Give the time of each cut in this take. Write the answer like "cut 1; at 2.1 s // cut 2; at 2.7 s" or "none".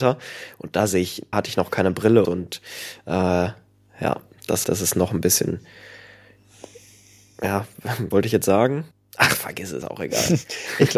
cut 1; at 1.3 s // cut 2; at 2.2 s // cut 3; at 4.6 s // cut 4; at 8.1 s // cut 5; at 8.9 s // cut 6; at 9.8 s